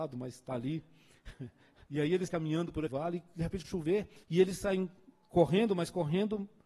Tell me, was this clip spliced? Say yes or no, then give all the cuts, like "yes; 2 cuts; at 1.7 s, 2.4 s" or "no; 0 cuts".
yes; 5 cuts; at 1.9 s, 2.3 s, 2.9 s, 3.6 s, 4.2 s